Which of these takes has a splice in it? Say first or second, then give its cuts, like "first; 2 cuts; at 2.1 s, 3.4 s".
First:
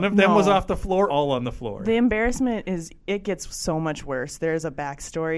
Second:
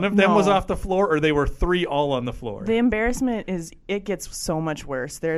first; 1 cut; at 1.1 s